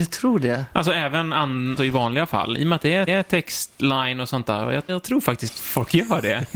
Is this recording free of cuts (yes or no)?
no